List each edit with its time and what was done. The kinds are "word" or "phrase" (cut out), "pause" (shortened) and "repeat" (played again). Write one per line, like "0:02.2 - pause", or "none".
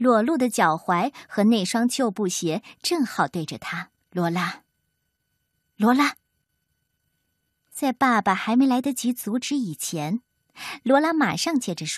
0:04.0 - pause